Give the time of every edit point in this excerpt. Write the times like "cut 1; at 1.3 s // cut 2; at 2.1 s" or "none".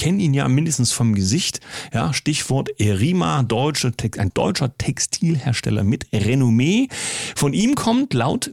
cut 1; at 4.3 s